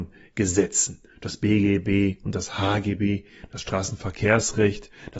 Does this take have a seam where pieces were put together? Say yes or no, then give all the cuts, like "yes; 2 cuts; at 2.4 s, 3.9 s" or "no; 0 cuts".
no; 0 cuts